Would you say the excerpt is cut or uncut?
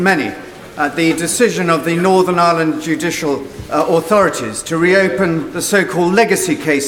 uncut